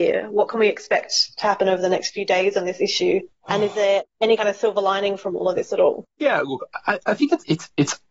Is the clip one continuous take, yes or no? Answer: no